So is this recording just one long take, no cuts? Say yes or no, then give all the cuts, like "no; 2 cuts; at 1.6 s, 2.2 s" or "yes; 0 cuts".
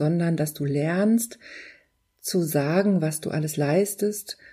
yes; 0 cuts